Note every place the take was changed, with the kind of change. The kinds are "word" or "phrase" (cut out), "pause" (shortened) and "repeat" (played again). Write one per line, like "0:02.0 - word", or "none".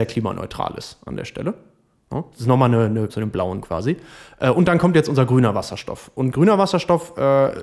0:03.1 - phrase

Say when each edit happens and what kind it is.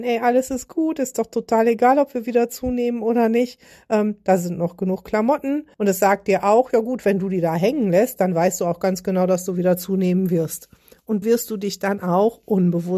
0:05.7 - pause
0:11.2 - word

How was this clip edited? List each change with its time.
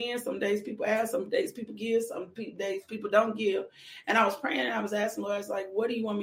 none

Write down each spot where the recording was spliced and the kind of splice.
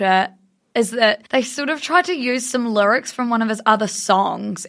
0:01.3 - pause

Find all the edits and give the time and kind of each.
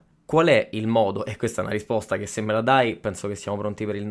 none

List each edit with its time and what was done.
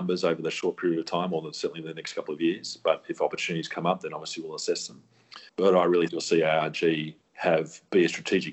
0:05.5 - pause
0:06.1 - word
0:07.3 - pause

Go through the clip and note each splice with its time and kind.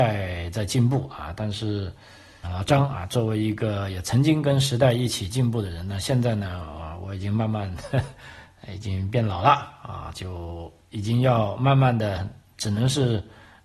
0:02.4 - word

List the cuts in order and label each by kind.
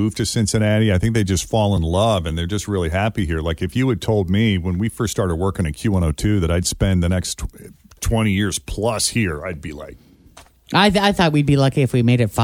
none

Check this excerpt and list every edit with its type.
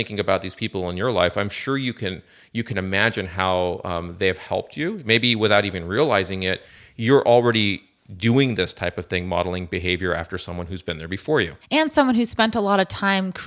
none

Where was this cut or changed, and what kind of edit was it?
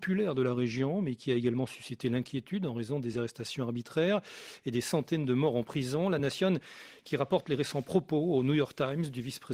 none

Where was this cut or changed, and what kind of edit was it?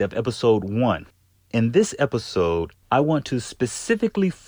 none

